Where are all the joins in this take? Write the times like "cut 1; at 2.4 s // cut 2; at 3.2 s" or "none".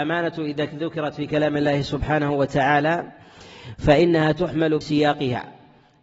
cut 1; at 4.8 s

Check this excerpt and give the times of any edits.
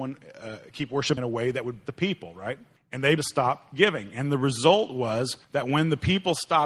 cut 1; at 1.2 s // cut 2; at 1.8 s // cut 3; at 2.8 s // cut 4; at 3.2 s // cut 5; at 5.4 s

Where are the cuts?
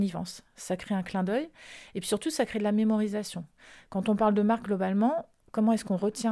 none

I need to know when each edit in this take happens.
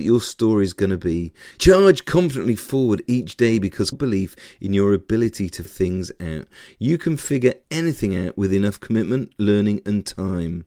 cut 1; at 3.9 s // cut 2; at 5.7 s

